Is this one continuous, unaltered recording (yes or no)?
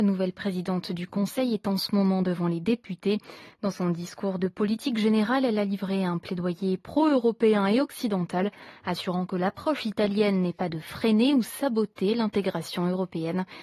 yes